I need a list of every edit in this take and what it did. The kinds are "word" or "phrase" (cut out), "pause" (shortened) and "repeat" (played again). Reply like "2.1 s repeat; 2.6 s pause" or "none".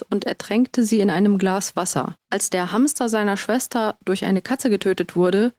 none